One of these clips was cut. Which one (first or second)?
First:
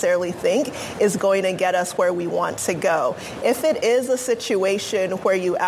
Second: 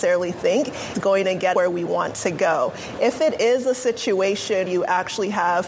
second